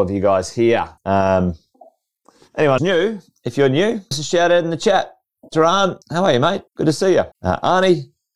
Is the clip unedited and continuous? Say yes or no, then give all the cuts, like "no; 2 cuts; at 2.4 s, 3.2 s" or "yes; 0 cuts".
no; 6 cuts; at 1.0 s, 2.8 s, 4.1 s, 6.0 s, 6.7 s, 7.3 s